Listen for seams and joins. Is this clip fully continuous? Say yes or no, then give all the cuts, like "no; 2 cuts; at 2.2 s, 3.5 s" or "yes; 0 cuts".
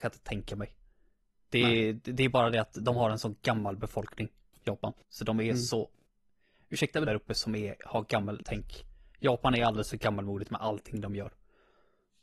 no; 3 cuts; at 5.0 s, 7.1 s, 8.4 s